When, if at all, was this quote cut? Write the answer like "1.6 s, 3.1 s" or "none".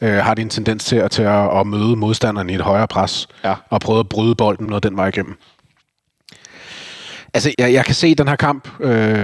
4.7 s, 7.5 s